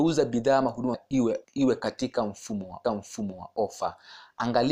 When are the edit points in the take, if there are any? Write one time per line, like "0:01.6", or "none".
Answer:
0:00.9
0:01.4
0:02.8